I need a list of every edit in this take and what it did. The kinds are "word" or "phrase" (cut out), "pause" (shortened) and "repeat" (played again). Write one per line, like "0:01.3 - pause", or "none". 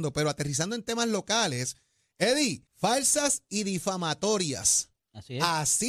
0:02.7 - pause